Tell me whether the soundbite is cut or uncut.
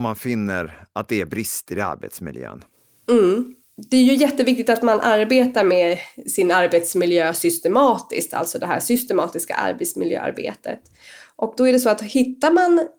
uncut